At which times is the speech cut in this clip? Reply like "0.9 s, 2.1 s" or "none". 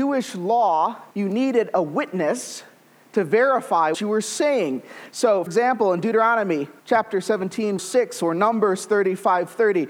1.1 s, 3.9 s, 5.5 s, 6.8 s, 7.8 s

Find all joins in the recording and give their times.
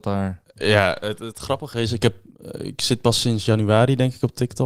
none

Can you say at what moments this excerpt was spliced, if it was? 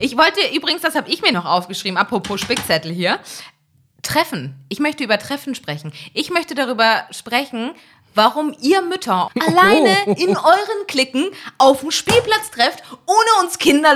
1.3 s, 9.3 s

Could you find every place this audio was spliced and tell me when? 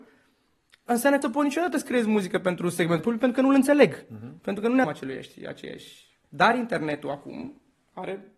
1.2 s, 3.0 s, 4.8 s, 6.2 s

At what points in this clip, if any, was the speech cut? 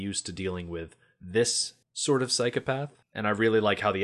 1.8 s, 3.0 s

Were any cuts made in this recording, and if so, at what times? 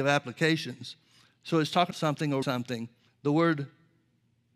1.2 s, 1.9 s, 2.4 s, 3.1 s

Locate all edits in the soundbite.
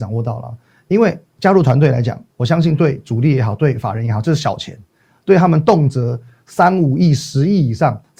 2.3 s

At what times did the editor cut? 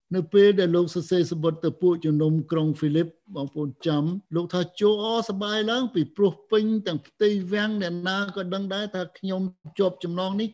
4.3 s

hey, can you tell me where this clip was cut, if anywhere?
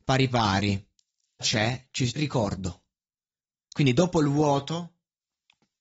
1.4 s, 2.2 s

